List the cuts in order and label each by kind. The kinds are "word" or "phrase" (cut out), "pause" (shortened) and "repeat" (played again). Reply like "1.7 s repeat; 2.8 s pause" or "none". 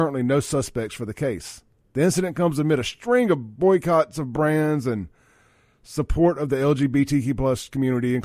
none